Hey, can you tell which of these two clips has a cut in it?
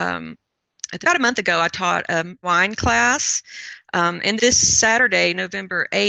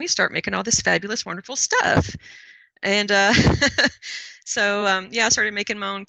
first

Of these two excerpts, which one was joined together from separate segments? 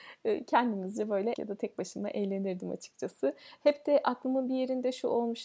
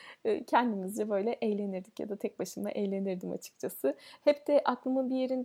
first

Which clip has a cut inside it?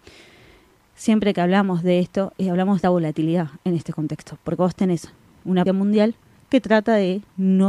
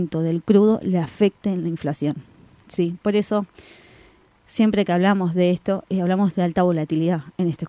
first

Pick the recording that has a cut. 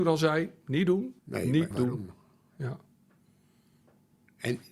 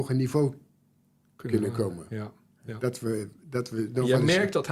first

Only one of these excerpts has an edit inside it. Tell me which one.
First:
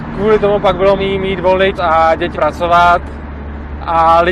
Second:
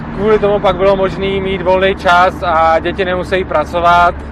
first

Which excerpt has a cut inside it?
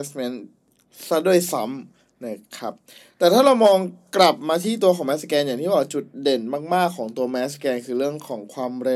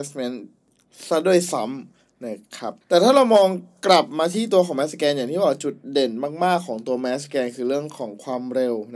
second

